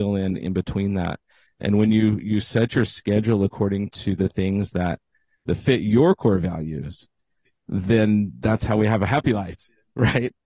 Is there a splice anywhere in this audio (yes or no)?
no